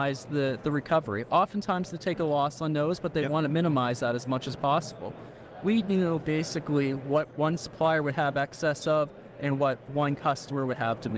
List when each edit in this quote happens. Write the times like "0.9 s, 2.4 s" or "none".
none

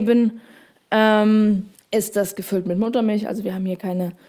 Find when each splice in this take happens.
1.7 s

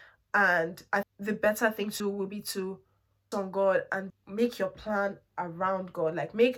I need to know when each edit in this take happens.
1.0 s, 2.0 s, 3.3 s, 4.1 s

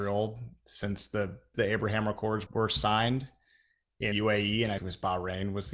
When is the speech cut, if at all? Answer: 1.5 s, 2.5 s, 4.1 s, 4.8 s

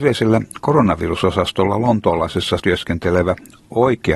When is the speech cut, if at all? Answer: 2.6 s

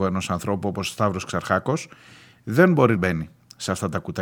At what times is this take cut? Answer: 3.0 s

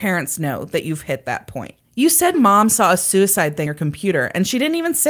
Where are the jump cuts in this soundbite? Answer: 1.8 s, 2.3 s, 3.7 s

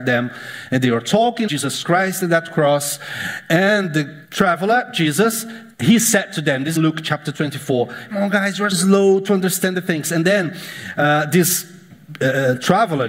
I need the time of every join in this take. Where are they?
1.5 s, 4.2 s, 5.7 s, 6.8 s, 8.1 s, 8.7 s

